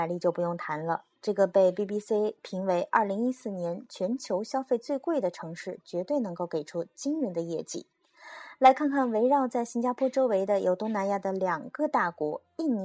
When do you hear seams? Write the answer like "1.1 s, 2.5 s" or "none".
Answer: none